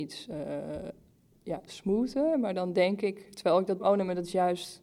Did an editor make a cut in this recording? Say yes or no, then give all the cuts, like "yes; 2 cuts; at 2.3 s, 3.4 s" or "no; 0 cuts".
yes; 2 cuts; at 1.7 s, 3.8 s